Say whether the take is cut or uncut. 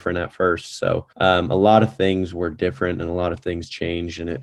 cut